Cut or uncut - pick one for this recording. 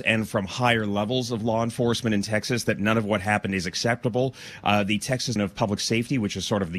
cut